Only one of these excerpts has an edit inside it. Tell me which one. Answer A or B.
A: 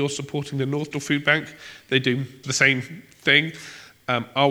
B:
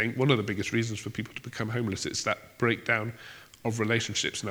A